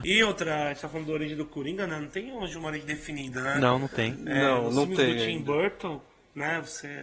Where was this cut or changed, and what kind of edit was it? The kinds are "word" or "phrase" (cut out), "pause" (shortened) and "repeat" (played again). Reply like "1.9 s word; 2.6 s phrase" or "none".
none